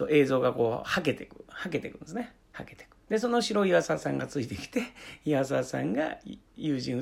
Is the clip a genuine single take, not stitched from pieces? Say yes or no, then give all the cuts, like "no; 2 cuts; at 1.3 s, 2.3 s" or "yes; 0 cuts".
no; 2 cuts; at 2.4 s, 3.0 s